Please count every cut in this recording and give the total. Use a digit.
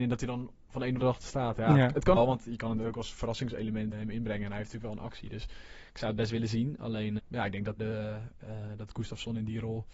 5